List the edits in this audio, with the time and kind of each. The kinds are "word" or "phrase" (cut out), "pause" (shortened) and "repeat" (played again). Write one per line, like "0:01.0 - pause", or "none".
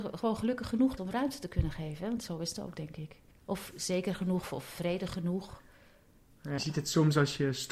0:01.0 - word
0:03.3 - pause
0:06.6 - word